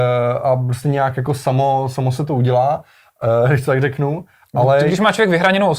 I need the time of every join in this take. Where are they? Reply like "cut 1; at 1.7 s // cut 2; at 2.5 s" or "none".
none